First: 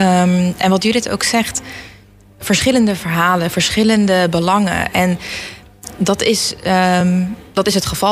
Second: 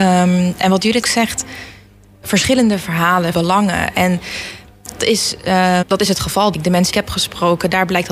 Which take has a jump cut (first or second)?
second